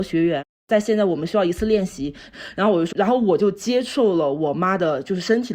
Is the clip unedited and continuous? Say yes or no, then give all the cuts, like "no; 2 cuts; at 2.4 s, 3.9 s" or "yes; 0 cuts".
no; 1 cut; at 2.9 s